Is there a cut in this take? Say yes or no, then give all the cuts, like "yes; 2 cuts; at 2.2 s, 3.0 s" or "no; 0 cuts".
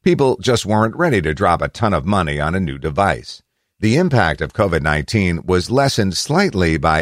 no; 0 cuts